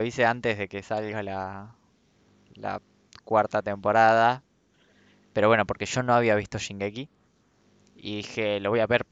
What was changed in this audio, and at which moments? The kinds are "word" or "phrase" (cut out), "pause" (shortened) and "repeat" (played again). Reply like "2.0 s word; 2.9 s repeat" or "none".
none

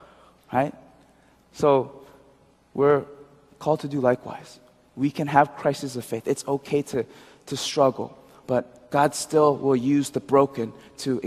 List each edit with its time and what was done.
none

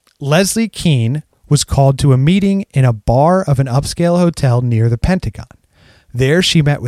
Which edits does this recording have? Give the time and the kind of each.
none

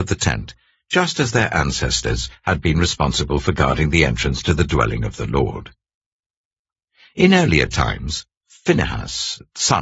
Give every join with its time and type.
none

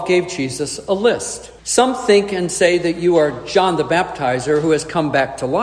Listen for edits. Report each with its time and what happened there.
1.6 s pause

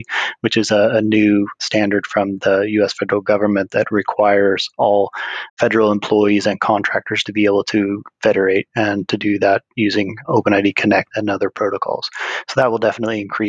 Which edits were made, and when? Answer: 5.5 s pause

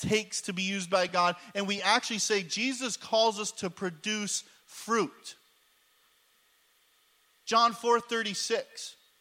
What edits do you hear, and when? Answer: none

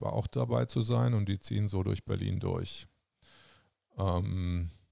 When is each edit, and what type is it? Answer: none

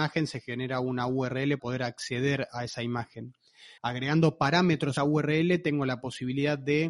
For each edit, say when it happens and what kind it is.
1.6 s word; 3.8 s pause; 5.0 s word

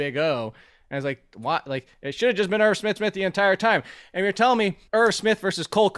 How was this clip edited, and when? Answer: 3.0 s repeat; 4.9 s pause

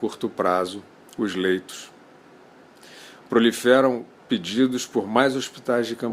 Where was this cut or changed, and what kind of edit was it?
1.0 s pause

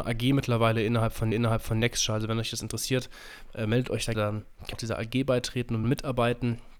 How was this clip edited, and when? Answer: 1.3 s repeat; 4.1 s word; 4.7 s word; 5.8 s word

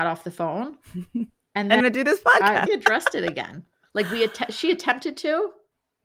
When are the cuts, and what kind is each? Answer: 1.8 s phrase; 2.7 s phrase

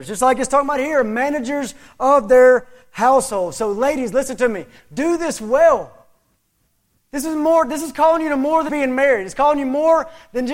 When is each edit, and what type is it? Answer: 8.7 s word

